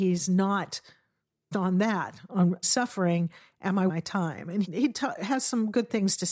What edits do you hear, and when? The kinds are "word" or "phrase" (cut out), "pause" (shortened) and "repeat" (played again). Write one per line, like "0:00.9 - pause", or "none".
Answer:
0:01.5 - word
0:02.6 - word
0:03.9 - word
0:04.6 - word